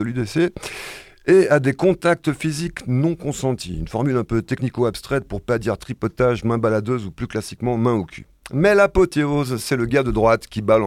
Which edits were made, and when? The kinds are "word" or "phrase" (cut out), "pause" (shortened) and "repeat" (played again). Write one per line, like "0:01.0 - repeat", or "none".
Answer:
none